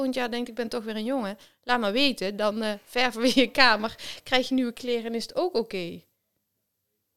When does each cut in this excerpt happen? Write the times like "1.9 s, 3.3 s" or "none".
none